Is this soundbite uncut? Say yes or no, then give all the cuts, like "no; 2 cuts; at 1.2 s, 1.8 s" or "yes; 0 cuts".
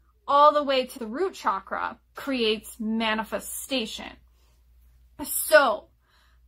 no; 2 cuts; at 1.0 s, 2.1 s